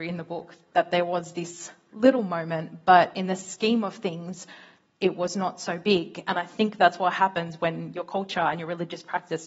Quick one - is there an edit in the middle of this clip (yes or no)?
no